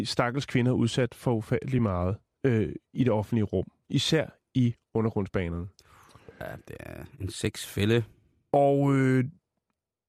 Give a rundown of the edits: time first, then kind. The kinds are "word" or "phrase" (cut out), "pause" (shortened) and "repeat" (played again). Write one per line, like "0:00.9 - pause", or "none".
none